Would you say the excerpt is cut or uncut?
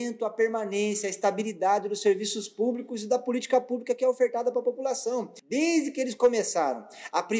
uncut